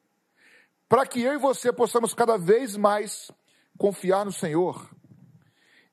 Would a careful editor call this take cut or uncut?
uncut